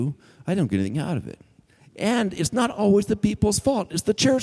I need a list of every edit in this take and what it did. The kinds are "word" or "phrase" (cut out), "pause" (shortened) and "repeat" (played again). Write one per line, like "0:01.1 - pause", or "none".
none